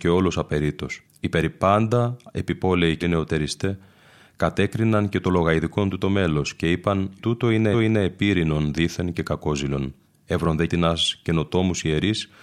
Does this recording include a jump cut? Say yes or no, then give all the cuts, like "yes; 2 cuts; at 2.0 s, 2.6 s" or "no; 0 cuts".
yes; 6 cuts; at 1.0 s, 3.0 s, 7.2 s, 7.7 s, 10.0 s, 10.7 s